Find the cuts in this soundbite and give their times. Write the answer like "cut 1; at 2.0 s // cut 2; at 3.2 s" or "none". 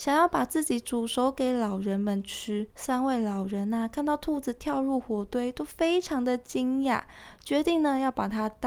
cut 1; at 2.7 s